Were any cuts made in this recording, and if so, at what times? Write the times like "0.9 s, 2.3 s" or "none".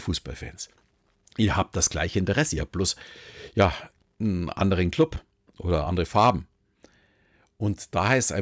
none

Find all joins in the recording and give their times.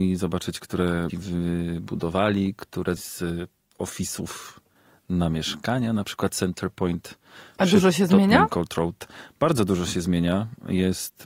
1.1 s, 3.0 s

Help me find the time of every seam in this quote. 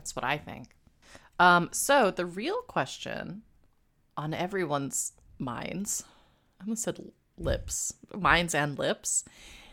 none

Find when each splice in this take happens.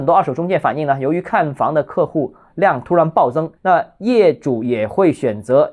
3.6 s

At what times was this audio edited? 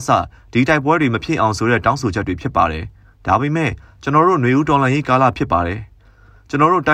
3.0 s

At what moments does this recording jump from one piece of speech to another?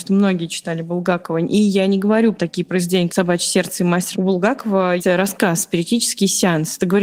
2.3 s, 3.1 s, 4.1 s, 5.0 s

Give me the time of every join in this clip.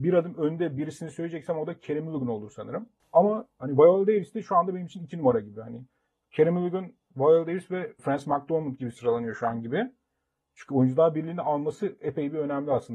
8.0 s

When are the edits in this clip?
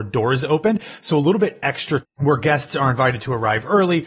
2.0 s

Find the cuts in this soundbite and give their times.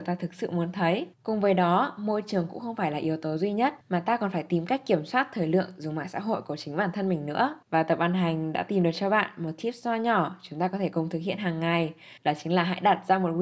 1.1 s, 3.8 s, 7.6 s, 12.2 s

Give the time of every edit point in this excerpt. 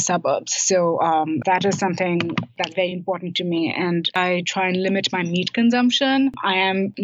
none

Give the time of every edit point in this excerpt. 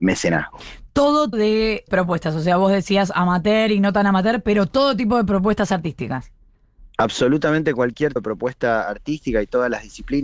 1.3 s, 1.9 s, 8.2 s

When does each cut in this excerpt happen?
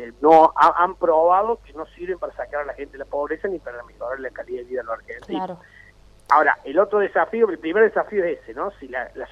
none

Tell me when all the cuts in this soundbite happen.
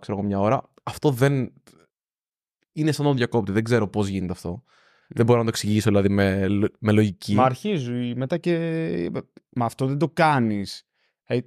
none

